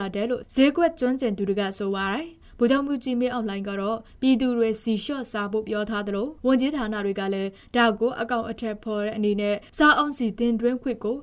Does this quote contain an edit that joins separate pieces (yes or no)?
yes